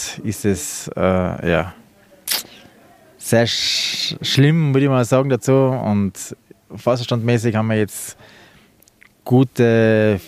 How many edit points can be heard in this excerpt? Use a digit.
0